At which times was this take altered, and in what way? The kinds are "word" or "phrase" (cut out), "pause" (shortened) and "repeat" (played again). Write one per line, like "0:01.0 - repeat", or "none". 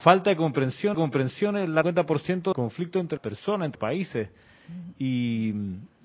0:00.9 - repeat
0:01.8 - phrase
0:02.5 - phrase
0:03.2 - word
0:03.7 - word